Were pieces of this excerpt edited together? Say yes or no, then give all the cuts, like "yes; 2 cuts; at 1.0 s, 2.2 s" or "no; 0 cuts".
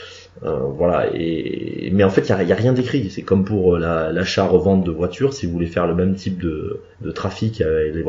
yes; 1 cut; at 6.9 s